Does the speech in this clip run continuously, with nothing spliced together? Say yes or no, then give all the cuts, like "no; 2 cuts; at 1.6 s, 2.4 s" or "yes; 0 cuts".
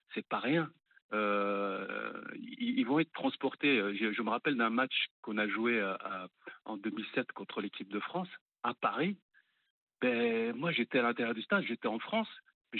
yes; 0 cuts